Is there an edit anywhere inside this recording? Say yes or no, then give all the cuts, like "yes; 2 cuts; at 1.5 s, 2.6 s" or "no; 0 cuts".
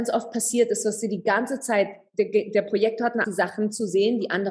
yes; 1 cut; at 3.2 s